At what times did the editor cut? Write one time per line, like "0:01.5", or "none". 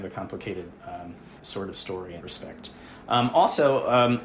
0:01.4
0:02.2